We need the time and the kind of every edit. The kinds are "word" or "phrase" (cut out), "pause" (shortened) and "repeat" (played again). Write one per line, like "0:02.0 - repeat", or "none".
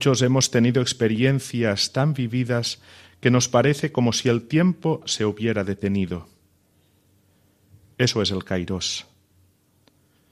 none